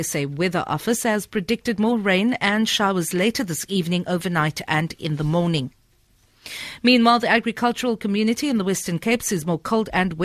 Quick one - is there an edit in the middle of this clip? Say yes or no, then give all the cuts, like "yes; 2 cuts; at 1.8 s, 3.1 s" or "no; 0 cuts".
no; 0 cuts